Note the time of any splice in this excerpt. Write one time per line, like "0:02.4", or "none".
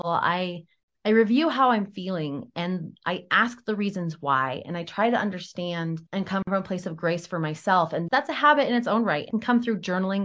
0:06.1
0:08.1
0:09.3